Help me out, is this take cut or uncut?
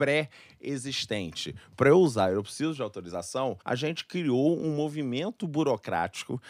cut